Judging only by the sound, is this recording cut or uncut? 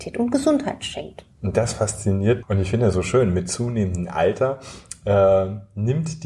cut